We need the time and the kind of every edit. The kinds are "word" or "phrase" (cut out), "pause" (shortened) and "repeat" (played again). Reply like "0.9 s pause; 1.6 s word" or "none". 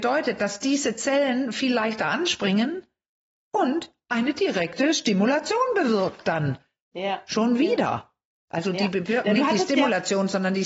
none